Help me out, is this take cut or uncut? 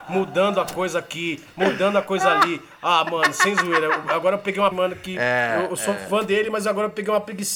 cut